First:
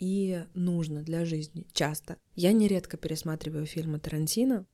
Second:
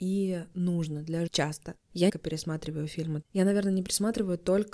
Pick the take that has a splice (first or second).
second